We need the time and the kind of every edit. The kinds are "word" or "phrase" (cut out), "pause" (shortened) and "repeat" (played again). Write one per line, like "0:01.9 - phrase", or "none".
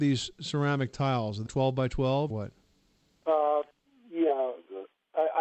0:01.5 - word
0:02.3 - phrase